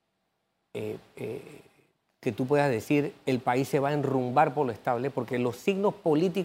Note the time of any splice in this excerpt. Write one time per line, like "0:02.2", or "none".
none

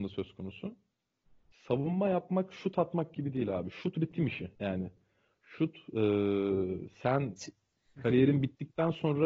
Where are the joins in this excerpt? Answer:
0:04.6

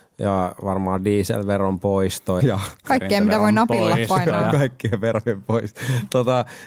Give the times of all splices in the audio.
0:02.4

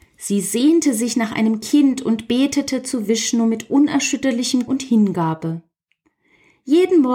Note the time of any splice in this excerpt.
0:04.7

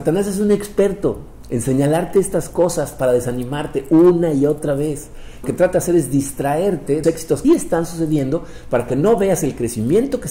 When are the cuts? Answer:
0:05.4
0:07.0
0:07.4

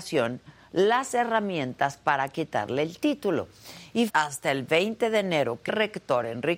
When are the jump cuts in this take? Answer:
0:04.1
0:05.7

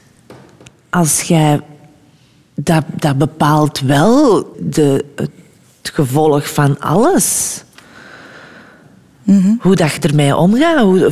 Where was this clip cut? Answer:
0:04.5

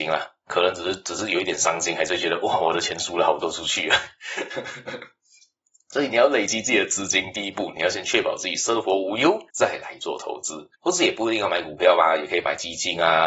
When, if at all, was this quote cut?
0:09.5
0:10.7

